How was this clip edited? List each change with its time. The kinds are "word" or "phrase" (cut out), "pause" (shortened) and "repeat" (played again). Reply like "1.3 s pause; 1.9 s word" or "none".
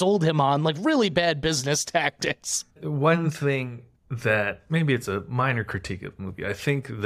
2.7 s pause; 3.9 s pause